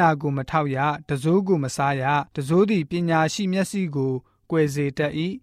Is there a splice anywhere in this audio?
yes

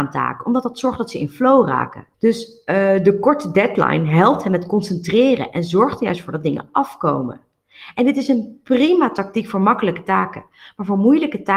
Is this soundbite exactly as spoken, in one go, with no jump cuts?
no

